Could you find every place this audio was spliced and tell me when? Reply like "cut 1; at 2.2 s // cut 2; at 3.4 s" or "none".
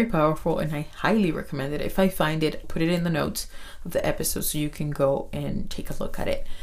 cut 1; at 2.6 s